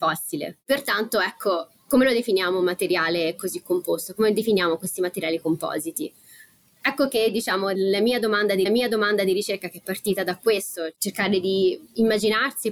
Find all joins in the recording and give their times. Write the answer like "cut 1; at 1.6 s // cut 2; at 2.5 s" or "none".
cut 1; at 8.7 s

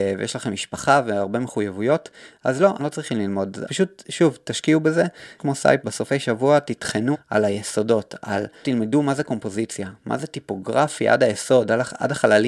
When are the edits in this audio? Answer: cut 1; at 2.8 s // cut 2; at 3.6 s // cut 3; at 5.4 s // cut 4; at 5.8 s // cut 5; at 7.1 s // cut 6; at 8.6 s

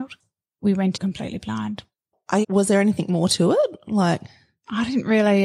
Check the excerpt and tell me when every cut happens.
cut 1; at 0.9 s // cut 2; at 2.4 s

